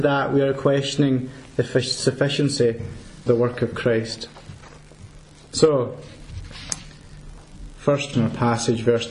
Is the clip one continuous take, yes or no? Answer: no